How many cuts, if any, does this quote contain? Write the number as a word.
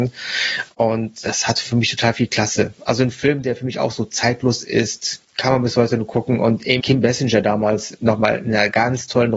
one